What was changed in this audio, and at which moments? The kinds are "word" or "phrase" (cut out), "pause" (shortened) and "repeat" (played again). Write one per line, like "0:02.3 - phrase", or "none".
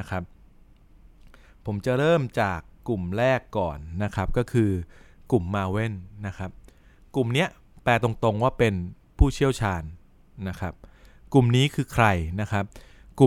none

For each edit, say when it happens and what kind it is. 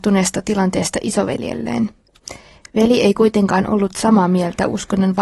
none

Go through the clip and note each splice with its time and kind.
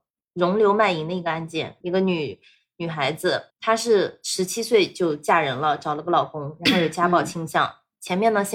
0:01.8 - word
0:03.5 - pause

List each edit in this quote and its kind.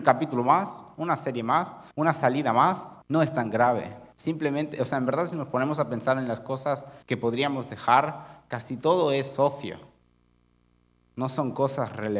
0:01.9 - pause
0:03.0 - pause
0:04.1 - pause
0:07.0 - pause

